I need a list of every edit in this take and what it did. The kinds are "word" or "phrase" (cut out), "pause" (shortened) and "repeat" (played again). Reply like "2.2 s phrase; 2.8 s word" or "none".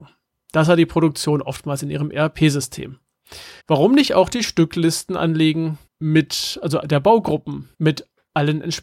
3.6 s pause; 5.9 s pause; 7.7 s pause